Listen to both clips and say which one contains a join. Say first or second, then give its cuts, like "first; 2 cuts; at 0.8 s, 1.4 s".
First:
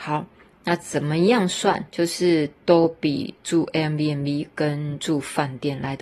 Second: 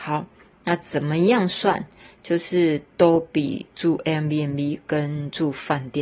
first; 1 cut; at 1.9 s